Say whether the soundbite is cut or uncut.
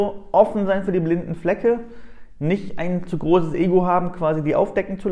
uncut